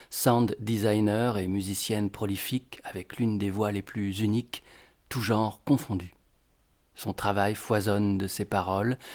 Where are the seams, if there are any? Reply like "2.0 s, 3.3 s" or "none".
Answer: none